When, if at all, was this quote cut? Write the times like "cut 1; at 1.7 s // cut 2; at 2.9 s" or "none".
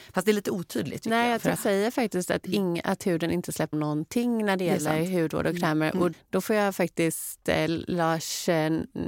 cut 1; at 1.6 s // cut 2; at 3.7 s // cut 3; at 6.1 s